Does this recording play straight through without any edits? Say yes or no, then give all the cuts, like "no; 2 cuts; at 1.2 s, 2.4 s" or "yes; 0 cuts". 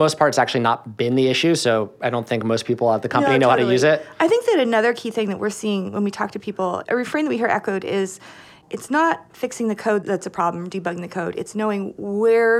no; 1 cut; at 9.3 s